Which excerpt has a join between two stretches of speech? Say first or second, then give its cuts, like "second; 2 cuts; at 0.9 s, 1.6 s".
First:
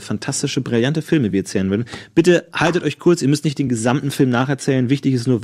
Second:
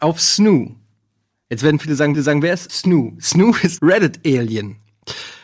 second; 3 cuts; at 2.1 s, 2.7 s, 3.8 s